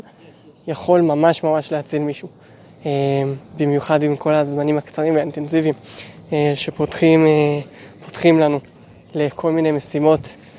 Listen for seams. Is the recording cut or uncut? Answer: uncut